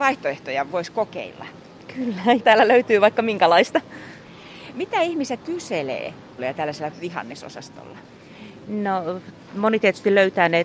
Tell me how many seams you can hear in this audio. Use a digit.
4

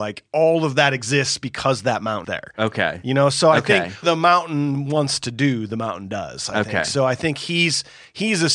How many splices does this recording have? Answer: 2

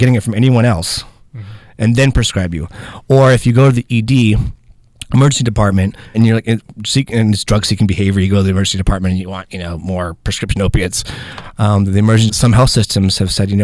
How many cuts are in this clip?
2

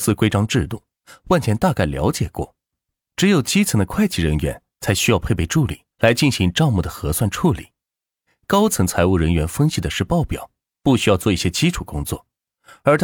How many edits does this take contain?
1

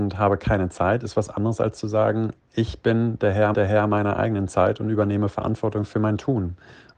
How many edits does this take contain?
1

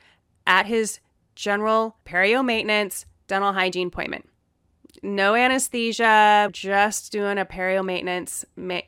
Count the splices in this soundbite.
2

